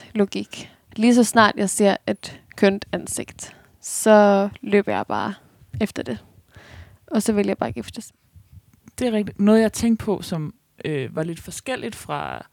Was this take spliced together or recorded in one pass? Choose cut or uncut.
uncut